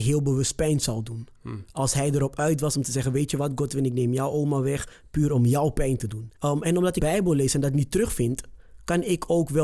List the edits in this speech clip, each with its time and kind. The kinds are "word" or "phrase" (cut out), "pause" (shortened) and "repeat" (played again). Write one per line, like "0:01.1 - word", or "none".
0:06.4 - pause
0:07.0 - word